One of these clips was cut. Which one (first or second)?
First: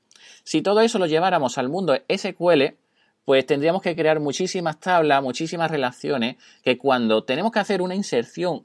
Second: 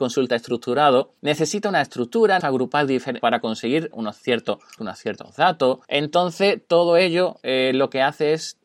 second